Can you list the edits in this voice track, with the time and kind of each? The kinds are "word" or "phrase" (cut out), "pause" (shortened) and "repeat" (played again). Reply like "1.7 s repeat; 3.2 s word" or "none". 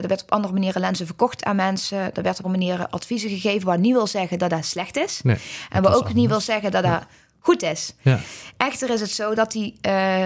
2.4 s word